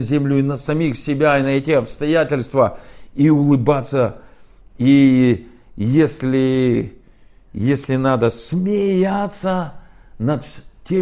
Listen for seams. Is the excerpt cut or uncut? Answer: uncut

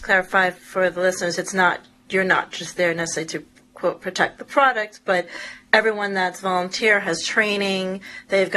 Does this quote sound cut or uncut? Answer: uncut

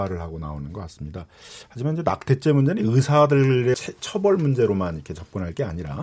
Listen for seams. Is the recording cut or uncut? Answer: cut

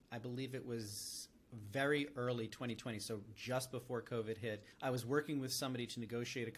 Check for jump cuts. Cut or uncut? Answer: cut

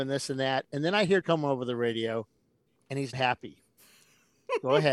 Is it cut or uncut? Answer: cut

